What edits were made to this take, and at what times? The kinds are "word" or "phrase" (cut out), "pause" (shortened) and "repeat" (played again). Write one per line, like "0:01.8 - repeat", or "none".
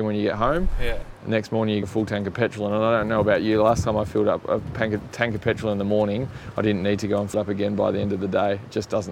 0:01.8 - phrase
0:07.3 - word